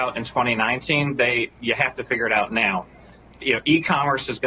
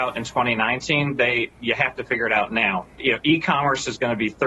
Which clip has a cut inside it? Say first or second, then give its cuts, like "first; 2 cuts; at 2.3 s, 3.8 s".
second; 1 cut; at 2.9 s